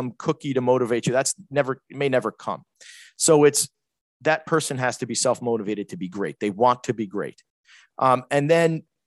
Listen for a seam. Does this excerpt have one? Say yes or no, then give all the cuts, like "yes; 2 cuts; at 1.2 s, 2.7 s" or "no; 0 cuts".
no; 0 cuts